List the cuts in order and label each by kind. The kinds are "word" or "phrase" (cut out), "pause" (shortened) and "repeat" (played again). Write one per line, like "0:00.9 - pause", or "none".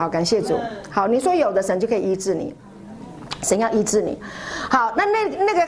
none